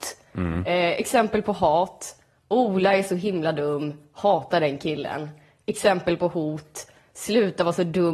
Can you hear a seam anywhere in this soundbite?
no; 0 cuts

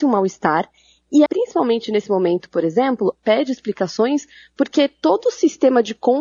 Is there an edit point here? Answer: yes; 2 cuts; at 1.3 s, 3.2 s

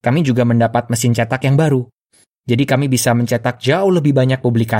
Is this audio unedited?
yes; 0 cuts

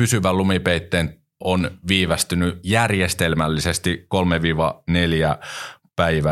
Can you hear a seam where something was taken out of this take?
yes; 1 cut; at 1.4 s

